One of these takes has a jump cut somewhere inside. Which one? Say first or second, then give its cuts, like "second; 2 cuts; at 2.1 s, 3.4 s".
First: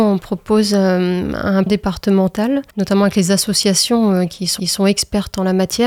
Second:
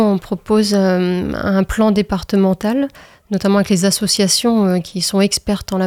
first; 3 cuts; at 1.7 s, 2.7 s, 4.6 s